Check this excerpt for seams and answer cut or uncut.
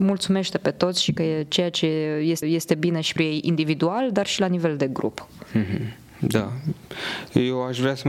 cut